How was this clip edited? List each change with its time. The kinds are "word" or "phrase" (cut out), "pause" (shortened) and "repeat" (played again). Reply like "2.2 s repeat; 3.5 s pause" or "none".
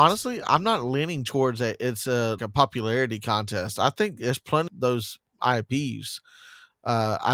2.4 s word; 4.7 s phrase